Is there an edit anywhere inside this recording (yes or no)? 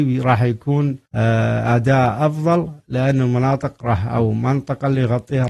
yes